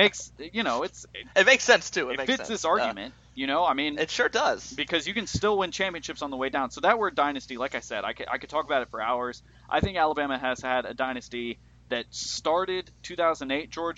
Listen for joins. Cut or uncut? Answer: uncut